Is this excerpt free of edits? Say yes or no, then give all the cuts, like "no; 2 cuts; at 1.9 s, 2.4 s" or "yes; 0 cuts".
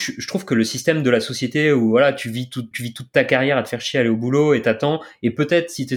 no; 1 cut; at 2.7 s